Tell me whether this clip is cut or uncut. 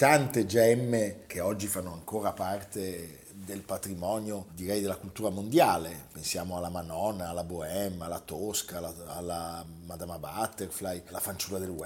uncut